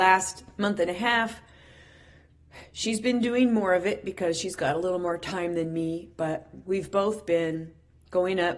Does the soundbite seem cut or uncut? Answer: uncut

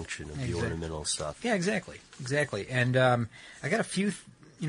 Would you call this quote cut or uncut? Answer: uncut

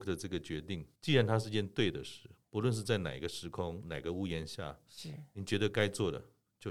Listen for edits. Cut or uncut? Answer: cut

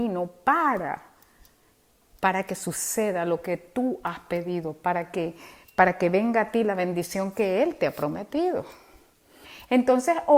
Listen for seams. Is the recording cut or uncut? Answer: uncut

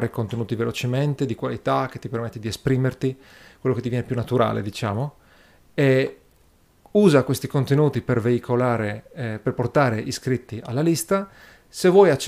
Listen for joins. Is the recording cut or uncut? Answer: uncut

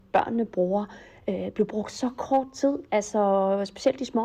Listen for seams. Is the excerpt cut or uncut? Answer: uncut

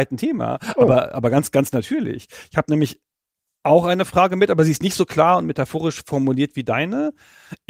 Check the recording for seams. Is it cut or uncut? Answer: uncut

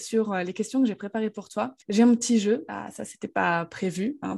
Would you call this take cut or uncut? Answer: cut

